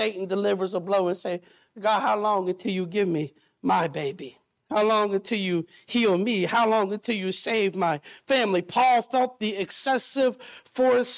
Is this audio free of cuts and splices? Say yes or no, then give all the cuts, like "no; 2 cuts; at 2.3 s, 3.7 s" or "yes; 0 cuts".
yes; 0 cuts